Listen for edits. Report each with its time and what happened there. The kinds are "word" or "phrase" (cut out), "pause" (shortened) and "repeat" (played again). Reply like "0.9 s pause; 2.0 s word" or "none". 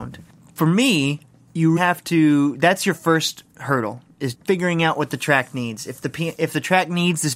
1.8 s word; 4.3 s word

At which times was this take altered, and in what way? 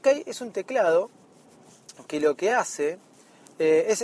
none

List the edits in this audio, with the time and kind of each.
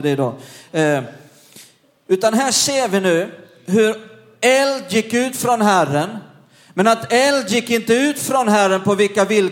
none

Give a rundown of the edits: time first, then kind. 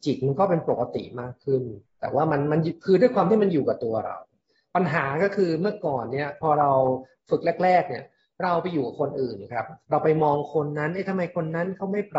1.8 s pause

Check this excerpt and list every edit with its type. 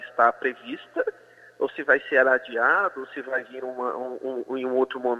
none

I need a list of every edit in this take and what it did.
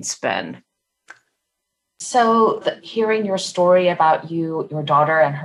2.6 s phrase

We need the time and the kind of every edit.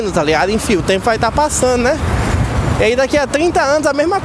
none

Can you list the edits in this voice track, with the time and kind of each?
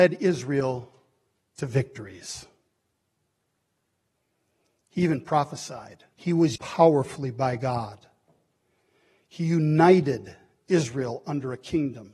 6.1 s pause; 6.6 s word

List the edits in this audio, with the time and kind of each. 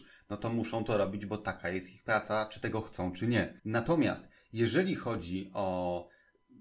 3.6 s pause

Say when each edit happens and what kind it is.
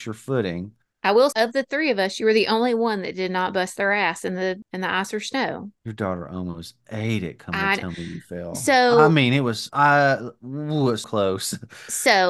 1.3 s word; 5.8 s pause; 11.0 s word

